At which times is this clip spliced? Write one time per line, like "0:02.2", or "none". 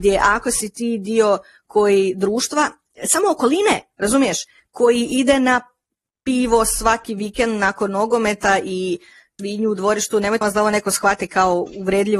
0:09.4
0:10.4